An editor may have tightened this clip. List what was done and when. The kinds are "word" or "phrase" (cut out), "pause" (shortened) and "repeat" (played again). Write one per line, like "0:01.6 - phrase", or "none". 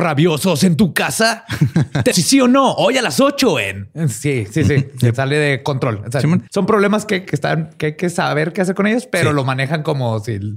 0:02.1 - word
0:06.5 - pause
0:07.2 - word